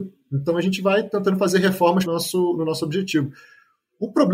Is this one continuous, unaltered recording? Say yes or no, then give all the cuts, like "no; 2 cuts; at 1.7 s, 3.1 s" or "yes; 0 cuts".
no; 1 cut; at 2.1 s